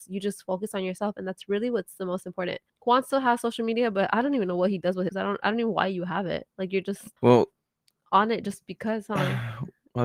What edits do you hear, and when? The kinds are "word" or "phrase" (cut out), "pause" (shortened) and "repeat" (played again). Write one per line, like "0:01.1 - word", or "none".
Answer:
0:02.7 - pause
0:05.1 - phrase
0:07.2 - pause